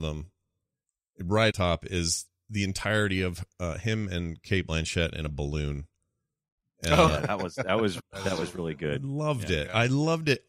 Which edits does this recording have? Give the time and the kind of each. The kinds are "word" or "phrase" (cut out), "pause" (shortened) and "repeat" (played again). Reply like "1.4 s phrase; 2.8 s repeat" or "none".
1.5 s phrase; 8.0 s word